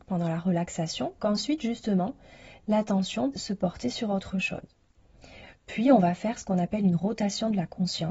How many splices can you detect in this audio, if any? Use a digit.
2